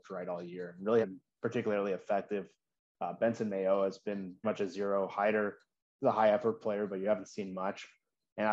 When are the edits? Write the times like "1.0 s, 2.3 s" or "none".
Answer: 1.0 s, 4.4 s